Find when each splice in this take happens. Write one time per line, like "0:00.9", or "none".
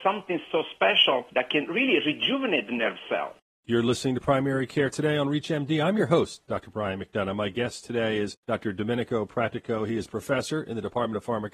none